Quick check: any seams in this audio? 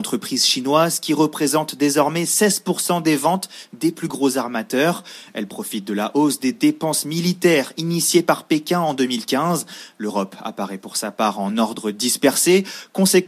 no; 0 cuts

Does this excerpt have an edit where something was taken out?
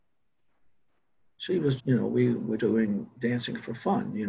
yes; 2 cuts; at 1.8 s, 2.6 s

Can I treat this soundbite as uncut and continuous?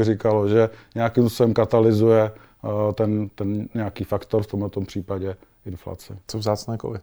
yes; 0 cuts

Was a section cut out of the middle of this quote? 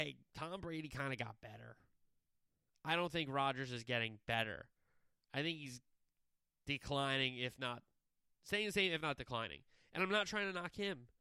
no; 0 cuts

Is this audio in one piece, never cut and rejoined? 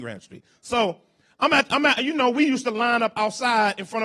yes; 0 cuts

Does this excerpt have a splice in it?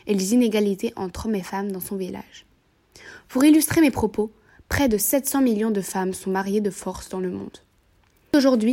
no; 0 cuts

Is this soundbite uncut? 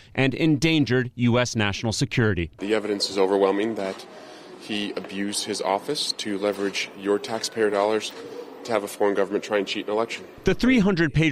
yes; 0 cuts

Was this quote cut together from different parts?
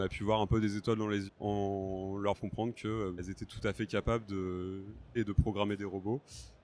yes; 4 cuts; at 1.3 s, 2.4 s, 3.2 s, 5.1 s

